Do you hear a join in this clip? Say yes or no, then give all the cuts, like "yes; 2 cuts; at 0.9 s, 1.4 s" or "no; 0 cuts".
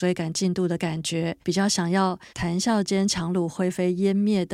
yes; 2 cuts; at 1.4 s, 2.3 s